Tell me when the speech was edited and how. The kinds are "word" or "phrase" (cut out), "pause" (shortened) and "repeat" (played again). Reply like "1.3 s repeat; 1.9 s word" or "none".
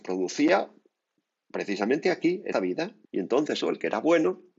2.5 s word; 3.0 s pause; 3.6 s phrase